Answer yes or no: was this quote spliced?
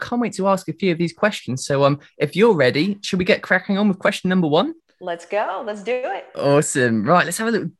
yes